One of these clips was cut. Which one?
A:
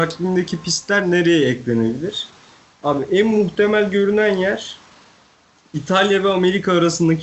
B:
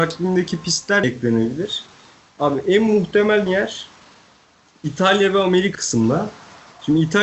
B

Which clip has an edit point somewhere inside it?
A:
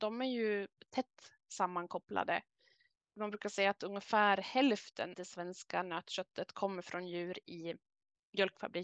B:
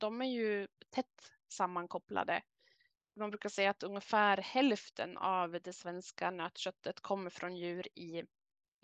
A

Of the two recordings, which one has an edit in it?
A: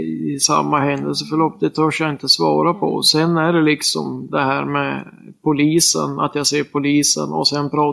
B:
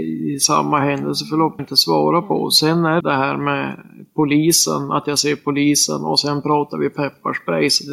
B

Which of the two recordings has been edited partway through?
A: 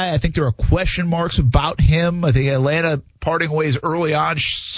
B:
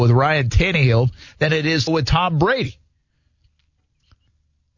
B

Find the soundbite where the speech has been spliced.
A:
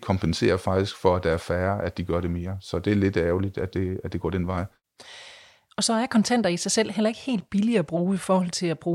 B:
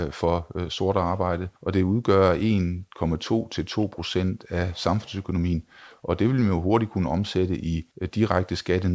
B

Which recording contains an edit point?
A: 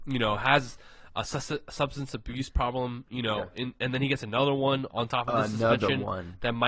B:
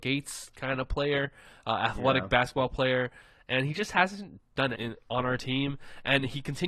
B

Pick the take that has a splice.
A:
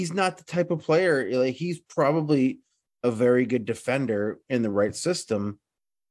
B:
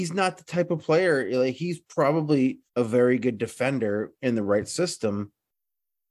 B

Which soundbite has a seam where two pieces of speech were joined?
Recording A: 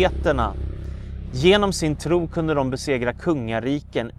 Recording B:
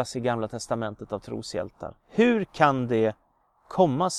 B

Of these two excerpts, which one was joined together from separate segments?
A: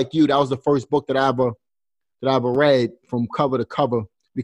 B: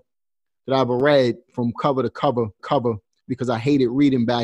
B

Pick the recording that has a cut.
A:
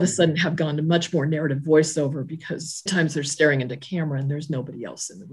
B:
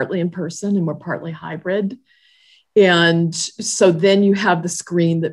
A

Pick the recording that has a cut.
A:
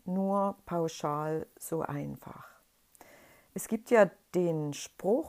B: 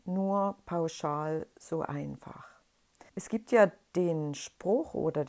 B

